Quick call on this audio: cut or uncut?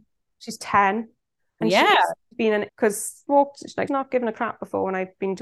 cut